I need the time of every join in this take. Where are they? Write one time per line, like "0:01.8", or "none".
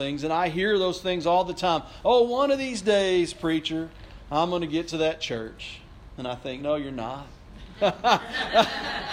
none